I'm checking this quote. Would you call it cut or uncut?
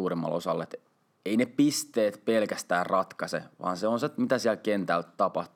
uncut